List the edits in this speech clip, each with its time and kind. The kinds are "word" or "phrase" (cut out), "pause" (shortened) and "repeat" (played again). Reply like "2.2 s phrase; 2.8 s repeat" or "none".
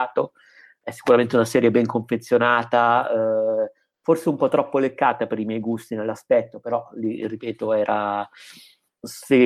none